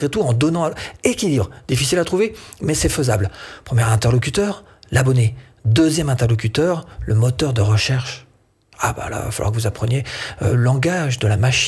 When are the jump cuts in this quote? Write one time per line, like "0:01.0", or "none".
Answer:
0:10.5